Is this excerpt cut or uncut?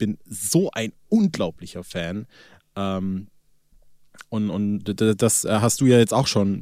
uncut